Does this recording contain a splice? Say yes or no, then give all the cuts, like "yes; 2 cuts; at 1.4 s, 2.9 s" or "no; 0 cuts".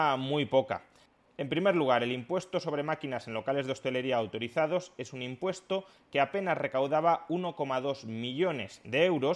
no; 0 cuts